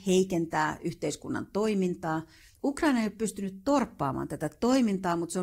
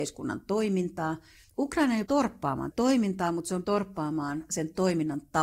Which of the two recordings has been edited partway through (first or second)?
second